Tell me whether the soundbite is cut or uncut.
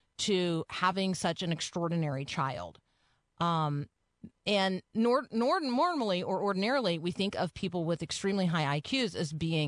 uncut